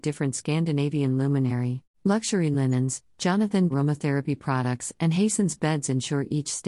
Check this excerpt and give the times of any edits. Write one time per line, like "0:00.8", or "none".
0:01.9
0:03.7